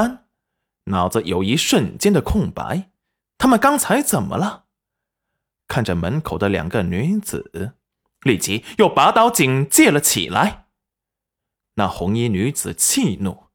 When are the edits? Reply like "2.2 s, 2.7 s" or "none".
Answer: none